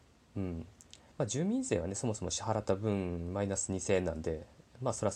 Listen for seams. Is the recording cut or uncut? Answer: cut